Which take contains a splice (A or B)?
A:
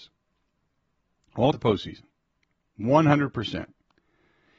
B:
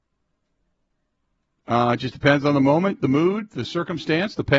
A